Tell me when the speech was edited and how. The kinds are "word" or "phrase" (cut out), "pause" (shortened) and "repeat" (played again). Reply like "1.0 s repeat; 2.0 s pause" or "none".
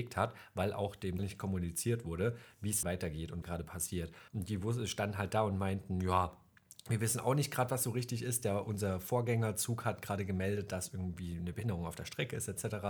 1.2 s word; 2.8 s phrase; 3.4 s phrase; 4.3 s pause